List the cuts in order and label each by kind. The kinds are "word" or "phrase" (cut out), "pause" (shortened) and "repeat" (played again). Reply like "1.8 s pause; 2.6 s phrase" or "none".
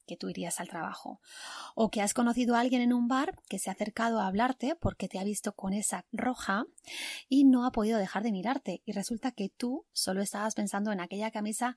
6.1 s word